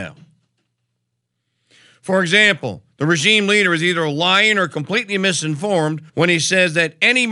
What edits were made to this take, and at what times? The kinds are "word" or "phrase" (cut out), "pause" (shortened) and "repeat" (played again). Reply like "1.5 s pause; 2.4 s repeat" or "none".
6.1 s pause